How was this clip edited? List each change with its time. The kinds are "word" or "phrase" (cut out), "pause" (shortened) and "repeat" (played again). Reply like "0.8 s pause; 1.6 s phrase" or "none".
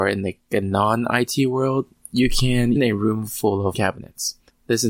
2.8 s word; 3.7 s word